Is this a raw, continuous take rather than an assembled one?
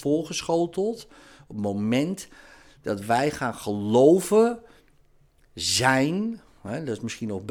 yes; 0 cuts

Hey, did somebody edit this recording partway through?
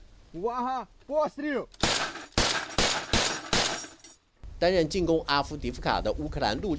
no; 0 cuts

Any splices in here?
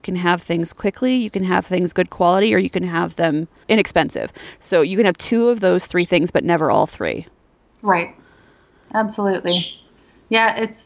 no; 0 cuts

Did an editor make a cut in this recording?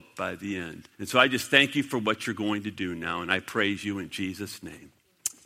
yes; 1 cut; at 0.9 s

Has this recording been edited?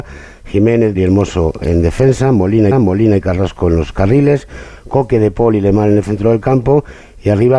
yes; 2 cuts; at 0.9 s, 2.7 s

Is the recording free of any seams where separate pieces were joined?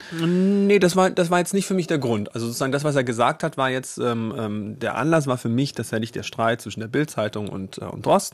yes; 0 cuts

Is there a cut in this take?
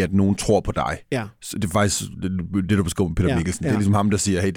no; 0 cuts

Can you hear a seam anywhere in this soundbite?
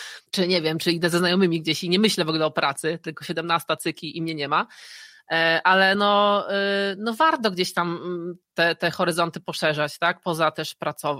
no; 0 cuts

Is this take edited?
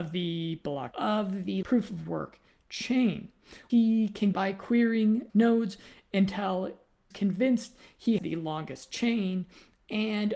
yes; 7 cuts; at 0.9 s, 1.6 s, 3.7 s, 4.3 s, 5.3 s, 7.1 s, 8.2 s

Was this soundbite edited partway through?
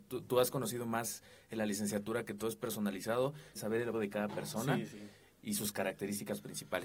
yes; 2 cuts; at 3.5 s, 3.9 s

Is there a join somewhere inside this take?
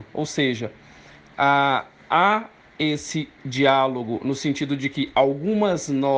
no; 0 cuts

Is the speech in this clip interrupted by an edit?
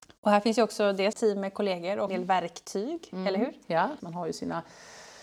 yes; 3 cuts; at 1.1 s, 2.1 s, 4.0 s

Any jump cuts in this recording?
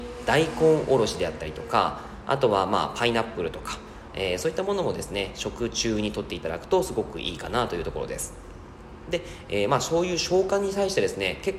no; 0 cuts

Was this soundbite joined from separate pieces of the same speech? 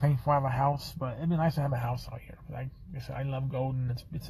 no; 0 cuts

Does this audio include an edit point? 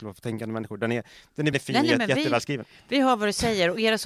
yes; 1 cut; at 1.5 s

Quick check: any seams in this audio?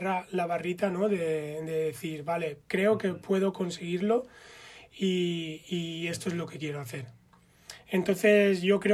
yes; 1 cut; at 2.6 s

